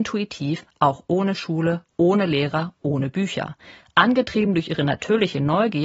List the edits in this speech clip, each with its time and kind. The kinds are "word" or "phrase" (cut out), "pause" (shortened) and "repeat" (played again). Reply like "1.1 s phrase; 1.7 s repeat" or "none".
none